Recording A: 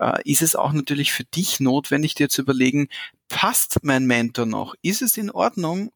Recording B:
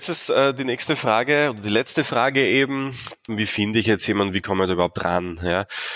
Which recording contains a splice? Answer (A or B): B